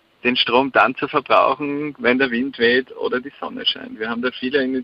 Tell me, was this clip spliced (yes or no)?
no